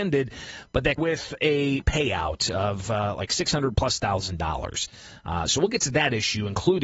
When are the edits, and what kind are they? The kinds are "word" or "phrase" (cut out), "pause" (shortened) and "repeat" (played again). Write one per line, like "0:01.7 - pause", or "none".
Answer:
0:01.0 - word